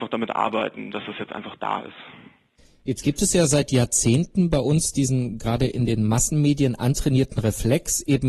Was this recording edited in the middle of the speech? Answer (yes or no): no